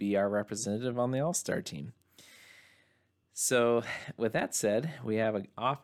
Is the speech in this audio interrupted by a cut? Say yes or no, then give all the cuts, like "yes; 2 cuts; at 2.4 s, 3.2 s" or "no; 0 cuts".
no; 0 cuts